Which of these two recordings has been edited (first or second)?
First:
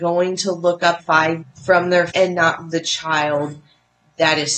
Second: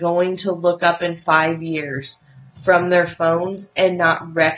first